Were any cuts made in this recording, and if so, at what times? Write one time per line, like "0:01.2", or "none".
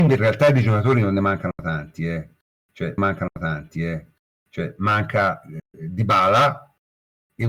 0:03.0